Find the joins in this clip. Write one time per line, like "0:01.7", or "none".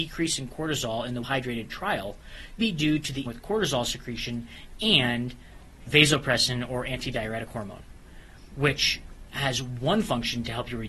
0:01.2
0:02.6
0:03.3
0:05.9